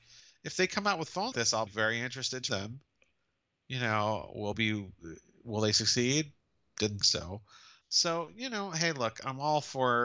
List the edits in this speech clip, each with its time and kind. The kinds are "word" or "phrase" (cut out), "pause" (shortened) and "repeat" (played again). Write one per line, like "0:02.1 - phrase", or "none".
0:01.3 - word
0:01.7 - word
0:02.5 - word
0:04.5 - word
0:07.0 - word
0:07.8 - word